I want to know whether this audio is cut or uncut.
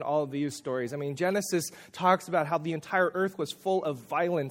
uncut